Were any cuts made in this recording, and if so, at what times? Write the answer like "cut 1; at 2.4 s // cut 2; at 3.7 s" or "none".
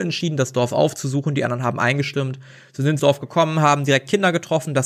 cut 1; at 3.0 s